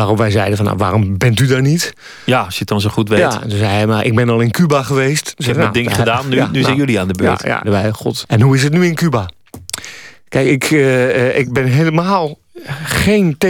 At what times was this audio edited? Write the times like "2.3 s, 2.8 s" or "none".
7.6 s, 8.2 s